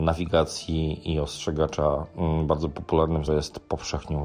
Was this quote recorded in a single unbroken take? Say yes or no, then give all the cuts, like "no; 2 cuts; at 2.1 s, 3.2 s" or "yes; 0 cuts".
no; 1 cut; at 3.3 s